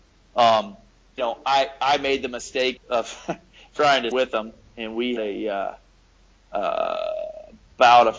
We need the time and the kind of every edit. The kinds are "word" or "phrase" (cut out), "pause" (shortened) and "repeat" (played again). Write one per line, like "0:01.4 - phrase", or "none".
0:01.2 - word
0:02.8 - word
0:04.1 - word
0:05.2 - word